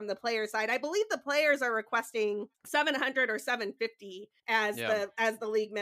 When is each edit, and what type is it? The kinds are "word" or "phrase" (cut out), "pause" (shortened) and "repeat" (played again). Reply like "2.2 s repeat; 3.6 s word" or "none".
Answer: 2.5 s pause; 4.4 s pause